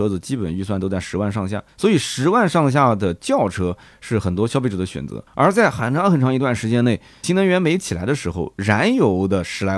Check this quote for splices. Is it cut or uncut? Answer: cut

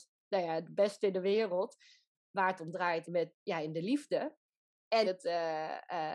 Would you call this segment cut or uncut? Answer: cut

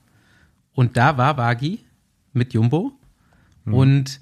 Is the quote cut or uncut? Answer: uncut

